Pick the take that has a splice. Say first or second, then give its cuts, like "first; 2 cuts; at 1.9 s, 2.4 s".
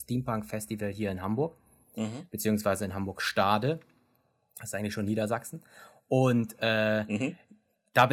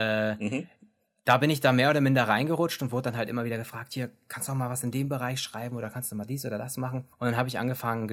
second; 1 cut; at 7.1 s